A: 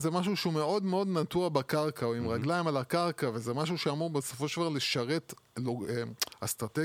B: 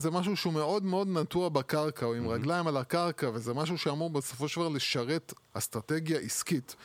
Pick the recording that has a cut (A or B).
B